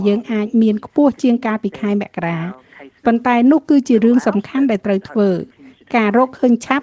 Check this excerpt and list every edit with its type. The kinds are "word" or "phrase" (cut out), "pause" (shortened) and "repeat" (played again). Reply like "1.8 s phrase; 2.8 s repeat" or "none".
none